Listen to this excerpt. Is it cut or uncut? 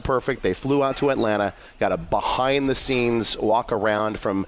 uncut